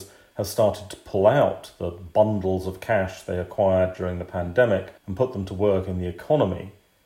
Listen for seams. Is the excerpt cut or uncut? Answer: cut